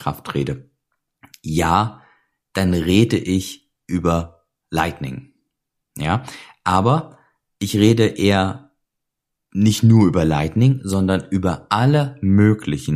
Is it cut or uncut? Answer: uncut